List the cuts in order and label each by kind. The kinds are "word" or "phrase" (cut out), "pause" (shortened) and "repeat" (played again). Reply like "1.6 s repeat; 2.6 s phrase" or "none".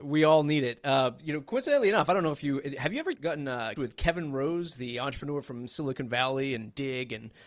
3.1 s word; 3.8 s word